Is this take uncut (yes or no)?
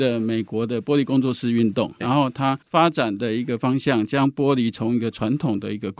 no